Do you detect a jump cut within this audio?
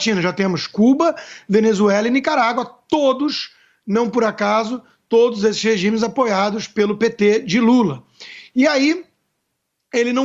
no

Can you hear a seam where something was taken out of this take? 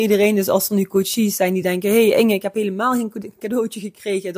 no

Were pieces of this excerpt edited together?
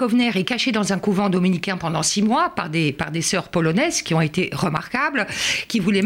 no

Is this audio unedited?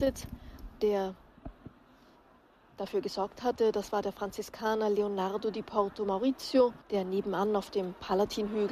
no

